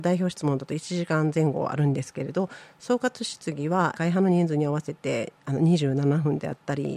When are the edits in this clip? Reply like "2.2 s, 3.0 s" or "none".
3.9 s